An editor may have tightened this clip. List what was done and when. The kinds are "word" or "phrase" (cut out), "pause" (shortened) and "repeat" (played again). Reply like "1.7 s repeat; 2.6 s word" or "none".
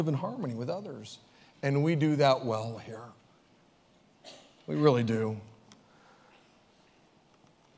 none